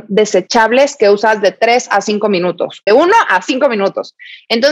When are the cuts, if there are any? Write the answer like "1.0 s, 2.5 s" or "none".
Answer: 2.9 s

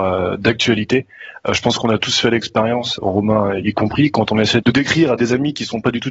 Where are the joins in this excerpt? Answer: 3.0 s, 4.6 s

